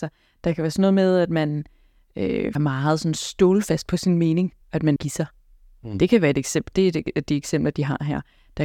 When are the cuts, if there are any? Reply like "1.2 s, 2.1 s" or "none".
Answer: 2.6 s, 4.6 s, 5.0 s